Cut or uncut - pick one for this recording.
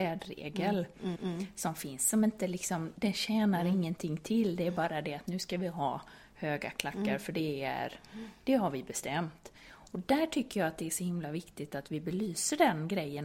cut